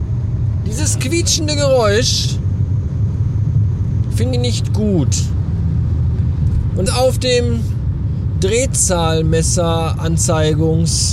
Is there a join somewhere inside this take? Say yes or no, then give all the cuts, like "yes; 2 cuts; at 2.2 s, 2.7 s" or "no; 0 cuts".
yes; 2 cuts; at 4.3 s, 6.9 s